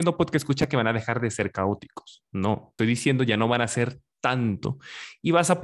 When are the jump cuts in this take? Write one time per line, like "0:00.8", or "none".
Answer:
0:02.8